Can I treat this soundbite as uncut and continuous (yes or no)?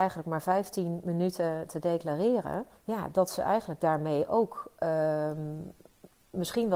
no